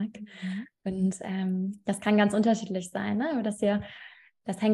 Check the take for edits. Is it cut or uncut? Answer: uncut